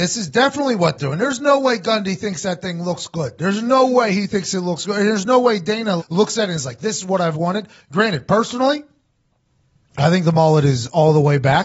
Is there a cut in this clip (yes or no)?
yes